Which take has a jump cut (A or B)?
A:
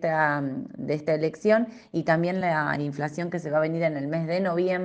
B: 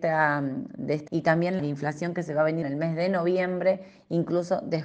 B